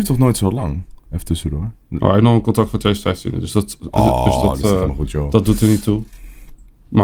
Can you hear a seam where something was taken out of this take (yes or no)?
no